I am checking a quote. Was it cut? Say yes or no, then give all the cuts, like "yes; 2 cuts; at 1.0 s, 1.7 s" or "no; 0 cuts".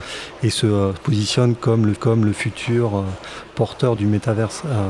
yes; 2 cuts; at 2.0 s, 4.0 s